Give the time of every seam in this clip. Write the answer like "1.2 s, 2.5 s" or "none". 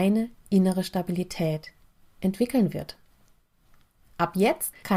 none